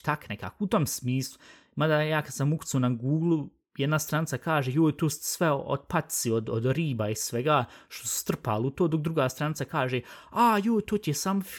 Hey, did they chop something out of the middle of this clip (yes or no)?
no